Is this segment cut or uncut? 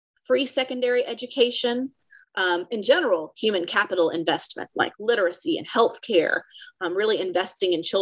uncut